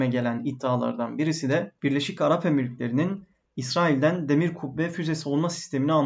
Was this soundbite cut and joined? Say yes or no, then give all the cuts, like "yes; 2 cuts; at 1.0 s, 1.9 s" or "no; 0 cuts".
no; 0 cuts